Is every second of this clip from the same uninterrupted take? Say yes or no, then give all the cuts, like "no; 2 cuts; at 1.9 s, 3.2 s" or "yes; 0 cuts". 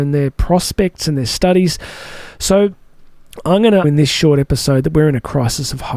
no; 1 cut; at 3.8 s